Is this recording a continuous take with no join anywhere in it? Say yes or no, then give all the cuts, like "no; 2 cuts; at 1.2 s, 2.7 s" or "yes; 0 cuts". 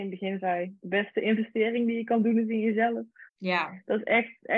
no; 1 cut; at 3.3 s